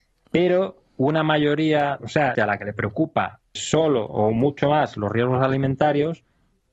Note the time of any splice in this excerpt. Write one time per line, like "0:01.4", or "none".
0:02.0
0:02.3
0:03.6